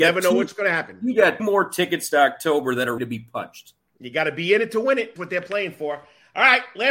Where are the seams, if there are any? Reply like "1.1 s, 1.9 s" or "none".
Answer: 1.4 s, 3.0 s, 5.2 s